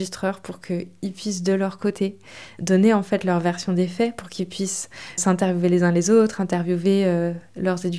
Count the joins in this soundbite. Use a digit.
1